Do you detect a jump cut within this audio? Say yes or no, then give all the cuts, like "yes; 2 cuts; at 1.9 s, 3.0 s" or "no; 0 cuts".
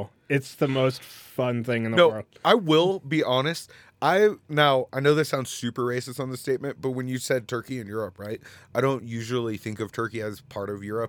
no; 0 cuts